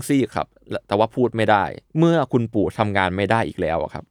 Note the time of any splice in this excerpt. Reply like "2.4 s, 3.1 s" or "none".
1.9 s